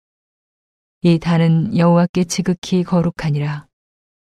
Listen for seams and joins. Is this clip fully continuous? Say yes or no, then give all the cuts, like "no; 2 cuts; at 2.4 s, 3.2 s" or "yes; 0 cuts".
yes; 0 cuts